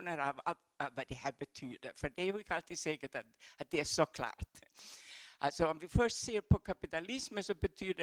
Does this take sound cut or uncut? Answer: uncut